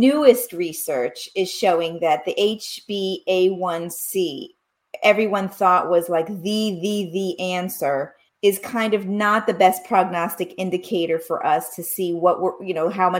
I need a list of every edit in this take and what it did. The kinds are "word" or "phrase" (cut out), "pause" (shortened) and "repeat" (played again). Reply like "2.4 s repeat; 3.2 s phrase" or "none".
8.3 s pause